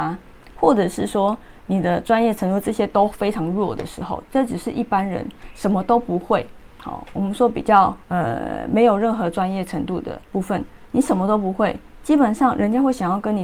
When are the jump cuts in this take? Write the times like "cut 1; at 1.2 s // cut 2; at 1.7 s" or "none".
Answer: cut 1; at 8.0 s // cut 2; at 10.2 s